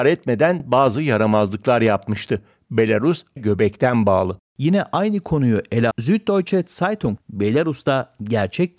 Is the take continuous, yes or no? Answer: no